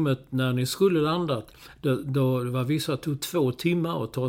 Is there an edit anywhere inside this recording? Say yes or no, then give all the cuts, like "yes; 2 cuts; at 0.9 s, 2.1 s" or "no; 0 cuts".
no; 0 cuts